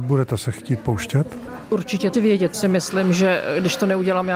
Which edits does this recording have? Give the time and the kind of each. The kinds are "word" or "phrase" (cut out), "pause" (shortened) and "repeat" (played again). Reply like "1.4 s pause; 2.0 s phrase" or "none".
2.1 s word; 2.5 s word